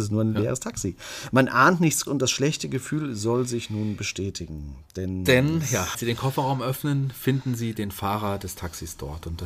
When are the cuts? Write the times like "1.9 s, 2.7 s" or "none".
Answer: 2.1 s, 5.9 s